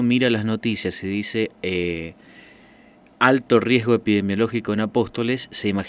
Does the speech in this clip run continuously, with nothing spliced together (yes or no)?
yes